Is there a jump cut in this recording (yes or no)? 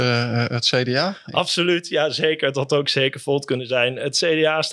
no